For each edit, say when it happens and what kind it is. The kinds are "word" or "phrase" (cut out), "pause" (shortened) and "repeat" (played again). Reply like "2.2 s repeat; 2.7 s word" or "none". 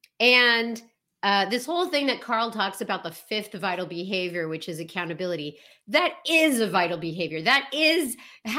none